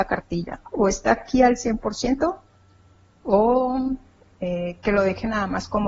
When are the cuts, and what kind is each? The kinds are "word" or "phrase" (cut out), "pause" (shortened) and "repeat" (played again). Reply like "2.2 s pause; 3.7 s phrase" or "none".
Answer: none